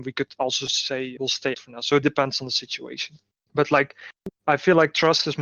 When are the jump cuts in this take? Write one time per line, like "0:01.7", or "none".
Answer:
0:01.2
0:01.5
0:02.0
0:03.3

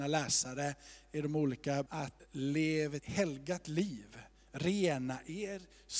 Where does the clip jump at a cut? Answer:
0:01.9
0:03.0

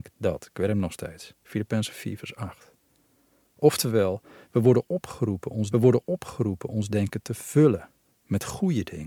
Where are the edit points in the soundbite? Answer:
0:05.7

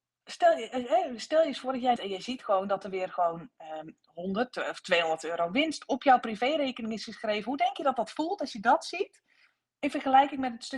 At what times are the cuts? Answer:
0:02.0

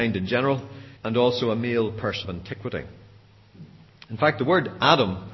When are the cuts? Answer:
0:01.0
0:02.2

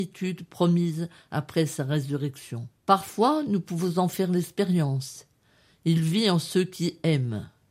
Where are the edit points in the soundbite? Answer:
0:02.8

